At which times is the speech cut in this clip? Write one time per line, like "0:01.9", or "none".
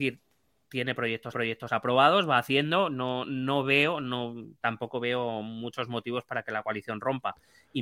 0:01.3